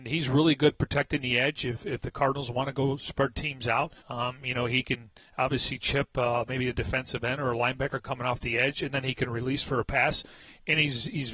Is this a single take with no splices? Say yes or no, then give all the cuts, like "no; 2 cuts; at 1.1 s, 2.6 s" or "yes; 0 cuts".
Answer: no; 1 cut; at 4.0 s